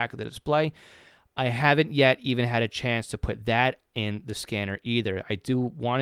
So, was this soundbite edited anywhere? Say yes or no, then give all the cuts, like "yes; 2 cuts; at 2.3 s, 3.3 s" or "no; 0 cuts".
no; 0 cuts